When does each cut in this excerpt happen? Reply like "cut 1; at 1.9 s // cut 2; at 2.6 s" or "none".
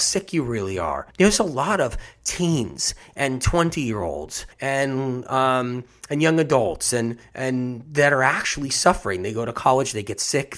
cut 1; at 1.1 s // cut 2; at 4.5 s